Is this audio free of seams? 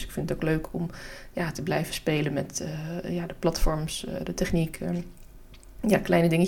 yes; 0 cuts

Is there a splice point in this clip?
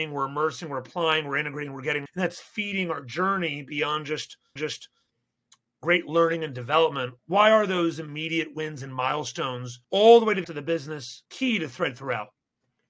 yes; 6 cuts; at 2.1 s, 4.6 s, 7.2 s, 9.8 s, 10.4 s, 11.3 s

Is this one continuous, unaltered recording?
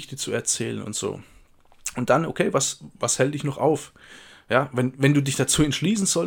yes; 0 cuts

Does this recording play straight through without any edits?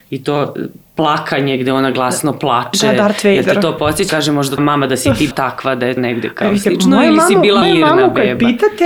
no; 5 cuts; at 4.1 s, 4.6 s, 5.3 s, 6.0 s, 7.6 s

